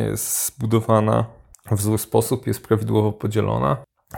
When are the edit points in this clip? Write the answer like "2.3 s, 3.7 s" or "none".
none